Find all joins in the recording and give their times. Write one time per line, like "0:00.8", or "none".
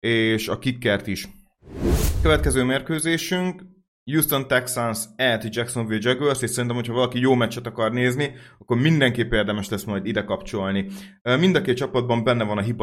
none